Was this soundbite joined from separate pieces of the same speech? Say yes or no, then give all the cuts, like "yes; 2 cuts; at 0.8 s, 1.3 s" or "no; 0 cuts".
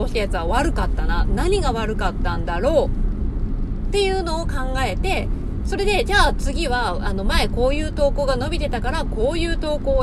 no; 0 cuts